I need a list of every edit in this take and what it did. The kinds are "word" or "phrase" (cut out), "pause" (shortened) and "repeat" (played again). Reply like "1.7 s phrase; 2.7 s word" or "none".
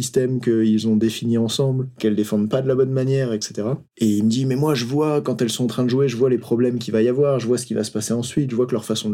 3.8 s pause